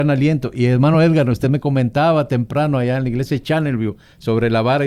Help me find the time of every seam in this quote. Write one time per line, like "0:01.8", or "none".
none